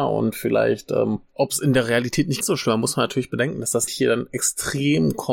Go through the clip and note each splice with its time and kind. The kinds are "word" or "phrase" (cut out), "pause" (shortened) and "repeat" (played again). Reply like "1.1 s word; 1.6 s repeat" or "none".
1.3 s pause; 2.4 s word; 3.9 s word